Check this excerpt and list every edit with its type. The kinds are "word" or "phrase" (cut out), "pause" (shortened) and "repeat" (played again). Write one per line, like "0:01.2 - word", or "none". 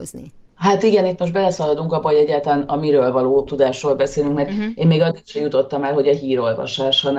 none